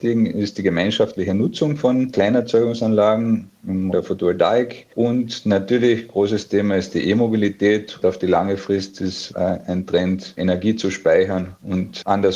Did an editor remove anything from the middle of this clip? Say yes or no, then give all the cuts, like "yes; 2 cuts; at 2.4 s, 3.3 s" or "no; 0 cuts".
yes; 4 cuts; at 3.9 s, 8.0 s, 9.3 s, 10.4 s